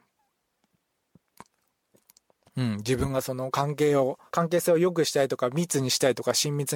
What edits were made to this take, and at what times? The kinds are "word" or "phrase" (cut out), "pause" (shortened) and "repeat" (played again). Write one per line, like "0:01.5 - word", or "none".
0:04.3 - pause